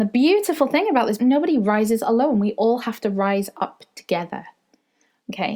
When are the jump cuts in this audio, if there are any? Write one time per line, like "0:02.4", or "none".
0:01.2